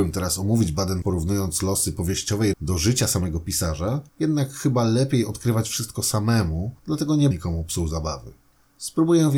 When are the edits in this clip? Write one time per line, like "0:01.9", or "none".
0:01.0
0:02.5
0:04.1
0:06.8
0:07.3